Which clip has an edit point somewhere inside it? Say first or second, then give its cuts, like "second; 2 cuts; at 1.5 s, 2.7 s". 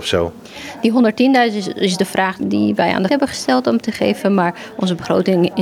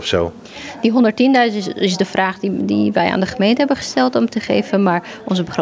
first; 2 cuts; at 2.4 s, 3.1 s